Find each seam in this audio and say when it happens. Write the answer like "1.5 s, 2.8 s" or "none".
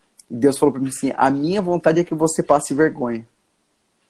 none